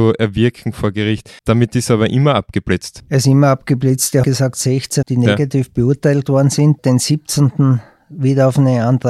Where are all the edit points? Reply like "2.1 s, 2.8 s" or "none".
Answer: 1.4 s, 4.2 s, 5.0 s